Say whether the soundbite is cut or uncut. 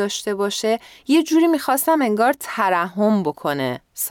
uncut